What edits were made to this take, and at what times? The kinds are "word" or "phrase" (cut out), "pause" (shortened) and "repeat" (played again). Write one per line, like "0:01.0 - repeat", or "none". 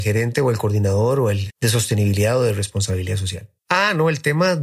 0:01.5 - word
0:03.6 - pause